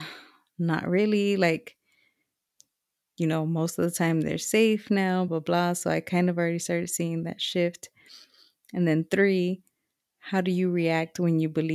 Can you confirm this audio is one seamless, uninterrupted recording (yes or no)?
no